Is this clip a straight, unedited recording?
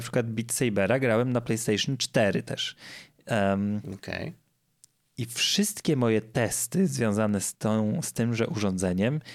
yes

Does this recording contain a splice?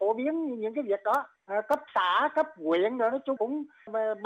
yes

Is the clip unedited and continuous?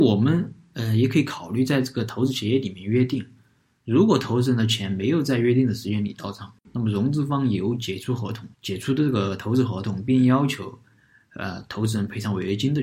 no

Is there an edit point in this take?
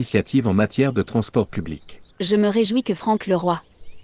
yes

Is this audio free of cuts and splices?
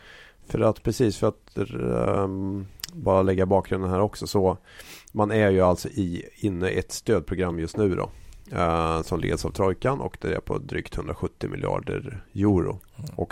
yes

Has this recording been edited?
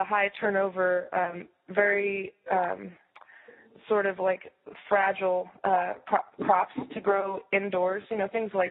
yes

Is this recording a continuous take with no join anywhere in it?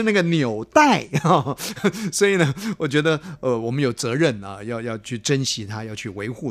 yes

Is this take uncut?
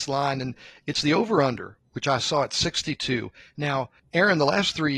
yes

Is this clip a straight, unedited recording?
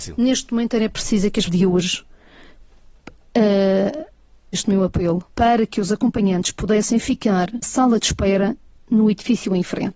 no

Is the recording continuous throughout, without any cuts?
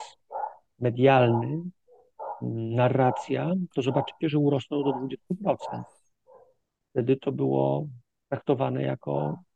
yes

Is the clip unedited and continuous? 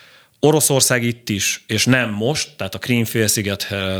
yes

